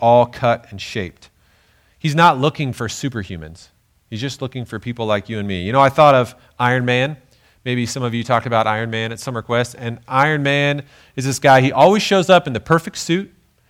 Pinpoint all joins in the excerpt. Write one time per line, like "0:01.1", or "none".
none